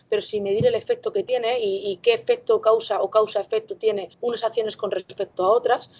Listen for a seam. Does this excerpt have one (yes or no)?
yes